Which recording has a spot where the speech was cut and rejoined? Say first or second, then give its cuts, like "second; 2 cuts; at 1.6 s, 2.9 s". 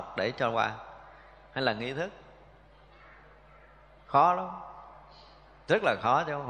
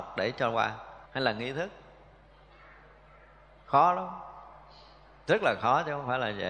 second; 1 cut; at 1.1 s